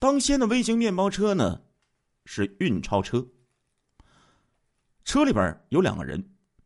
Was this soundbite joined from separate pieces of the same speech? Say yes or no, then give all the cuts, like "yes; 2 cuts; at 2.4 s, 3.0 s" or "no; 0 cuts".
no; 0 cuts